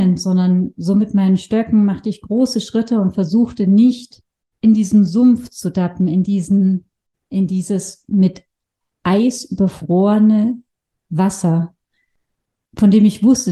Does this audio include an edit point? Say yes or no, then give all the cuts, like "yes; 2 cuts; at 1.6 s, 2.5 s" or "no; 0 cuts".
no; 0 cuts